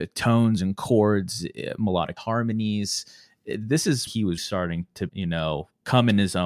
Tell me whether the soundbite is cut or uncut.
cut